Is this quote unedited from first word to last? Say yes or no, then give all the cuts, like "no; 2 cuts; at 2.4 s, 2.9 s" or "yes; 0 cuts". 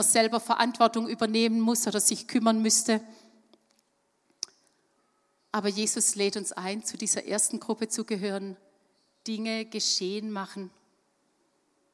yes; 0 cuts